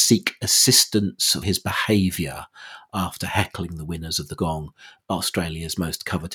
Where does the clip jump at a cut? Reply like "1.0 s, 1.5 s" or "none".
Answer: 1.4 s, 4.4 s